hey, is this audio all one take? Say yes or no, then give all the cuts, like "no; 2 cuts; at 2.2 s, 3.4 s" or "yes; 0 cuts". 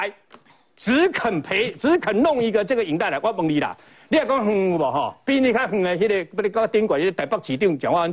yes; 0 cuts